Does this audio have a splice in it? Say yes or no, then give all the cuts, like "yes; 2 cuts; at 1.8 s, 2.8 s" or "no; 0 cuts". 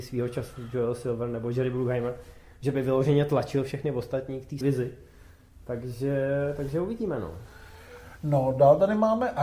yes; 1 cut; at 4.6 s